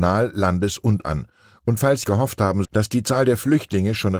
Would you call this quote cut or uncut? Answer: cut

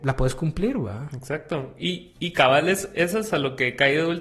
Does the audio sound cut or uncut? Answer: uncut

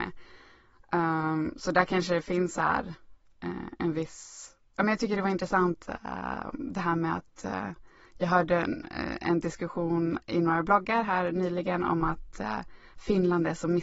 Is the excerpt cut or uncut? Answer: uncut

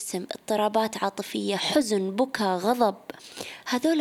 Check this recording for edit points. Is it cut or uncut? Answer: uncut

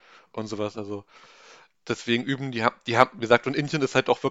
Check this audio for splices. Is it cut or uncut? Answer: uncut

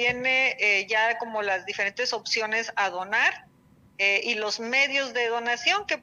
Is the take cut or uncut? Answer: uncut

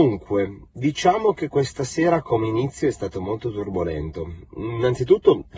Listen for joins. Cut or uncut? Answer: uncut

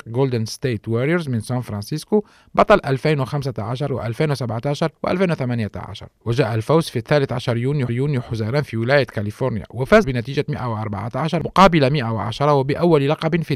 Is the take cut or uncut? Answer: cut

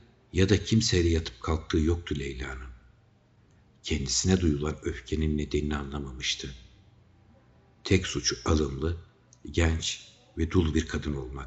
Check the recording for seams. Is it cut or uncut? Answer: uncut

